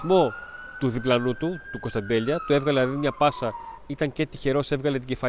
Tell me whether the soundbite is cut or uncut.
cut